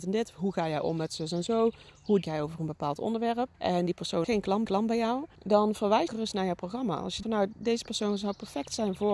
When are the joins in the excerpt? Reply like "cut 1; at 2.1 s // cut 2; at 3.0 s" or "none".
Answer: cut 1; at 2.2 s // cut 2; at 3.5 s // cut 3; at 4.2 s // cut 4; at 4.6 s // cut 5; at 5.3 s // cut 6; at 6.1 s // cut 7; at 7.2 s